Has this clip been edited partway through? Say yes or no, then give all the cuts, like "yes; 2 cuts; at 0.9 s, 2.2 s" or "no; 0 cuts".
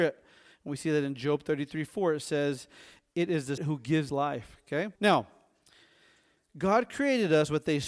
yes; 3 cuts; at 3.6 s, 4.1 s, 4.9 s